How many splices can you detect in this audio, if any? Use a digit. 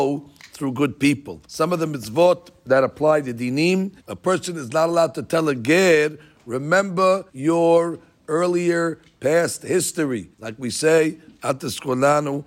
4